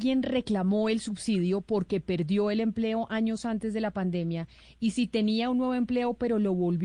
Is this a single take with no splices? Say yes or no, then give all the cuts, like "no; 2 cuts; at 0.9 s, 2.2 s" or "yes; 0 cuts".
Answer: yes; 0 cuts